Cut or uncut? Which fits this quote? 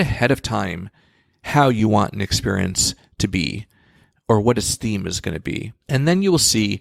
uncut